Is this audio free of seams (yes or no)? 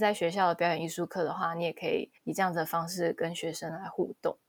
no